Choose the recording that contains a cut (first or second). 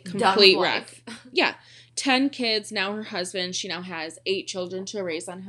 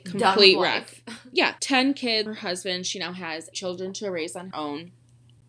second